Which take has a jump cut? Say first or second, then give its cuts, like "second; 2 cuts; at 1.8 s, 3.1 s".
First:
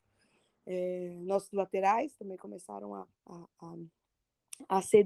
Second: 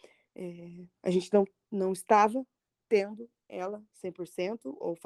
first; 1 cut; at 3.1 s